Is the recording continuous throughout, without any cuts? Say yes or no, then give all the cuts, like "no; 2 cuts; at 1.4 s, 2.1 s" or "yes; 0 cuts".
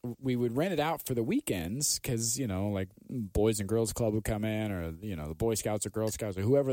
yes; 0 cuts